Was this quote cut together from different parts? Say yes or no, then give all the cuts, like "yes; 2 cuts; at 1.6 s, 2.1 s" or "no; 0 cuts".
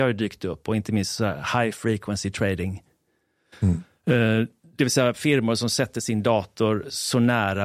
no; 0 cuts